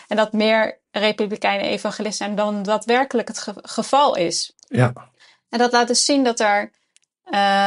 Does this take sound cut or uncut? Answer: cut